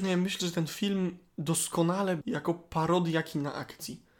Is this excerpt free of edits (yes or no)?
no